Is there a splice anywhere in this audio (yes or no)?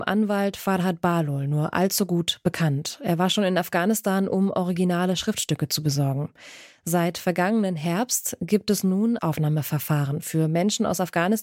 yes